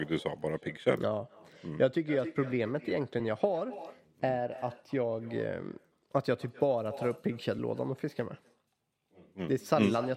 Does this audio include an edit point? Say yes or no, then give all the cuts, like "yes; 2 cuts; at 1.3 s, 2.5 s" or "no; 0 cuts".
no; 0 cuts